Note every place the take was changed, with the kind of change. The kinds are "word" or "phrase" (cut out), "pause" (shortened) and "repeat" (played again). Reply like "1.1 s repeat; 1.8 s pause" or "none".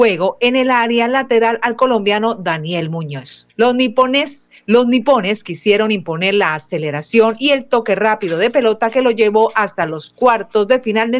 3.5 s pause